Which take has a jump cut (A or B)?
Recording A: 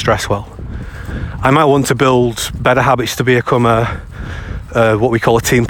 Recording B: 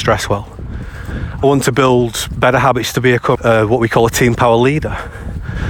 B